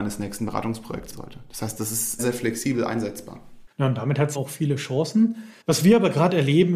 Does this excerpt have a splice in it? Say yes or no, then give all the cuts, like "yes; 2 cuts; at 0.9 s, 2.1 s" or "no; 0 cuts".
yes; 5 cuts; at 1.1 s, 2.2 s, 3.7 s, 4.3 s, 5.6 s